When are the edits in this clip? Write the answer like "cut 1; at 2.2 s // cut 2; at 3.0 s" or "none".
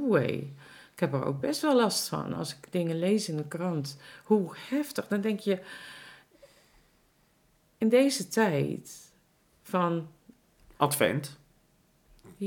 none